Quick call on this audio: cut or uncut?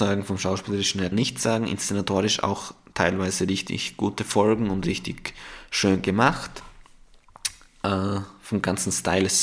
cut